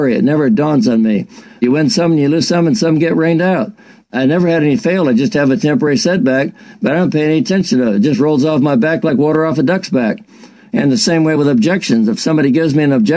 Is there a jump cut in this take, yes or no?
no